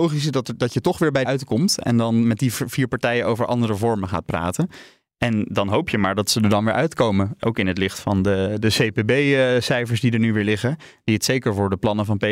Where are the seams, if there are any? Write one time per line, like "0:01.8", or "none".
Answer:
0:01.2